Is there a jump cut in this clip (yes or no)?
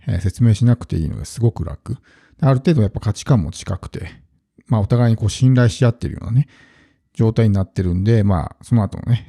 no